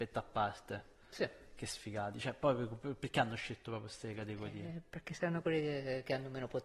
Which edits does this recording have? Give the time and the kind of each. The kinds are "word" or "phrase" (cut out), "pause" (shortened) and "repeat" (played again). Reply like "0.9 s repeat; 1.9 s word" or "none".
none